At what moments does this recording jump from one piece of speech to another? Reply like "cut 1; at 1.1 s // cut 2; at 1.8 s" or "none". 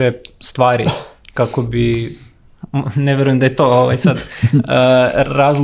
none